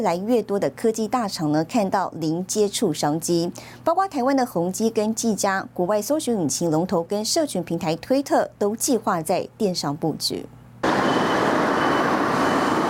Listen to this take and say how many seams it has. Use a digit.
1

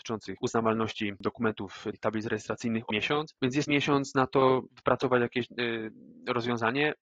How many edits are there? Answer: 4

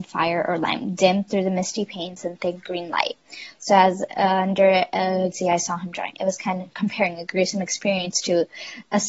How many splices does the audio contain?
1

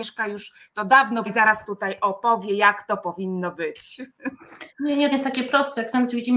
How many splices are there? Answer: 4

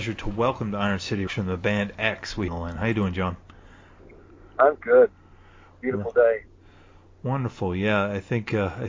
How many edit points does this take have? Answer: 3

